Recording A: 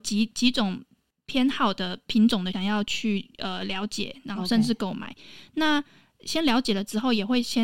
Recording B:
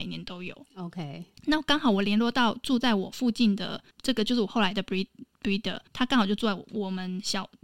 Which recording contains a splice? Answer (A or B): B